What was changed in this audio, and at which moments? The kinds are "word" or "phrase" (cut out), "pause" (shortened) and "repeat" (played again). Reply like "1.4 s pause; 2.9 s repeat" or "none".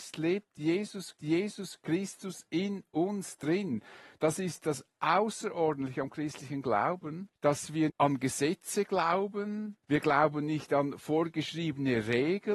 1.2 s repeat; 7.4 s pause; 7.9 s word; 9.8 s pause